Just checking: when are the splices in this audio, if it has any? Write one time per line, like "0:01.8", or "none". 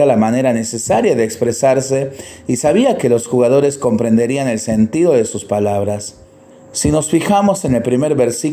0:06.5